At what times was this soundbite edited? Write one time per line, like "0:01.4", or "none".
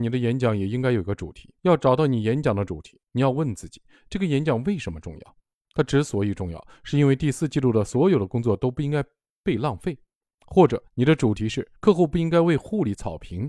0:01.6
0:03.0
0:10.9
0:11.8